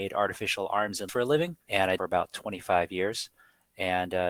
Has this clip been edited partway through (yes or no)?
yes